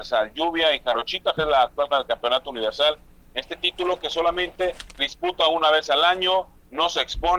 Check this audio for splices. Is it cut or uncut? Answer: cut